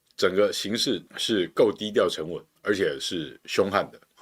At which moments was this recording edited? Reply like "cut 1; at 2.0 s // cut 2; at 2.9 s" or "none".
cut 1; at 1.1 s // cut 2; at 2.6 s